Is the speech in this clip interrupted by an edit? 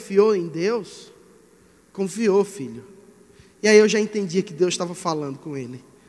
no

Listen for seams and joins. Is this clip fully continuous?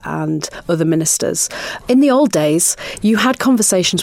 yes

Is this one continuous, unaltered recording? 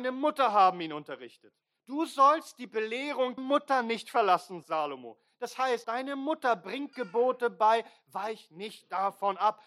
no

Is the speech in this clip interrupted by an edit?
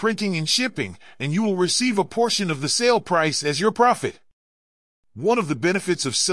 no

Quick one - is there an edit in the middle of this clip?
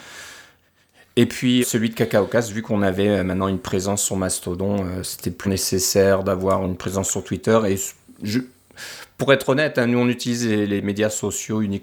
yes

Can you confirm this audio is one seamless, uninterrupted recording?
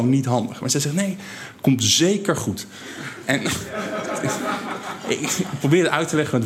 yes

